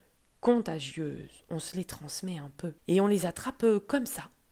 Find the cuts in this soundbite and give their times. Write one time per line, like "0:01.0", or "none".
0:02.8